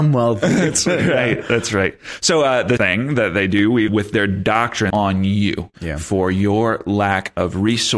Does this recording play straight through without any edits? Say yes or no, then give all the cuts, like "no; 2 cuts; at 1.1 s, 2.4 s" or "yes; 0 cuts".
no; 3 cuts; at 2.8 s, 3.9 s, 4.9 s